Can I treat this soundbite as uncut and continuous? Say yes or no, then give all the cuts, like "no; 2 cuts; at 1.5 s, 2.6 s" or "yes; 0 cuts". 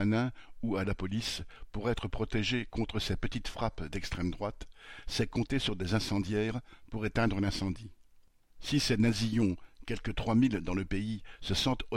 yes; 0 cuts